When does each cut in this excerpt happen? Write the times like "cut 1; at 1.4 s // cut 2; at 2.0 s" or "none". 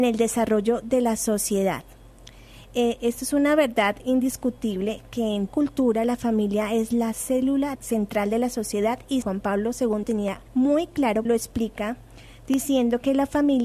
cut 1; at 5.5 s // cut 2; at 7.7 s // cut 3; at 9.2 s // cut 4; at 10.0 s // cut 5; at 10.5 s // cut 6; at 11.3 s